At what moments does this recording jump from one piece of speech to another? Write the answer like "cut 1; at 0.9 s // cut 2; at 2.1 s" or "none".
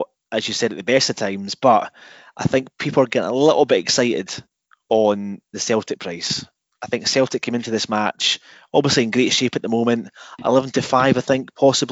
none